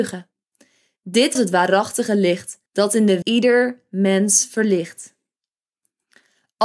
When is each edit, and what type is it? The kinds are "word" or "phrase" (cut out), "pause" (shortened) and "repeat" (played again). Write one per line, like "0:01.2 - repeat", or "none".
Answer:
0:01.4 - word
0:02.7 - pause
0:03.2 - phrase